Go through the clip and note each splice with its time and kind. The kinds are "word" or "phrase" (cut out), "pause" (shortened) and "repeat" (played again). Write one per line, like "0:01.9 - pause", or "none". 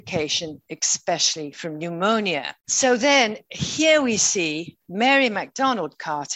0:02.6 - pause